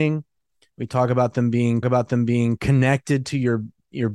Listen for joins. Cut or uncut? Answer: cut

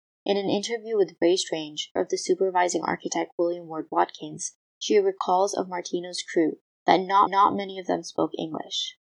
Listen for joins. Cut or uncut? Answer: cut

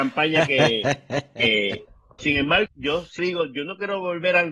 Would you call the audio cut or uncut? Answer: cut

